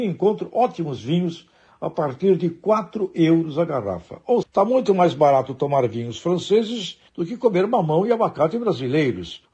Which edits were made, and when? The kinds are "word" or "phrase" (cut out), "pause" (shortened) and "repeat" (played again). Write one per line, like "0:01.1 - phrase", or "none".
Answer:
0:04.4 - word